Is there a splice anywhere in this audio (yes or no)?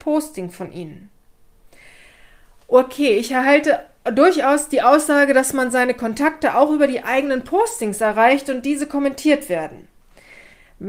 no